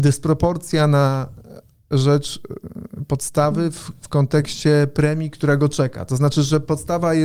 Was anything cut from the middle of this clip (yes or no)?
no